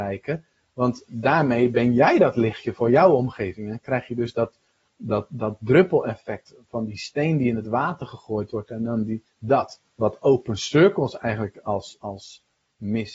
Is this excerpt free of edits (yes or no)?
yes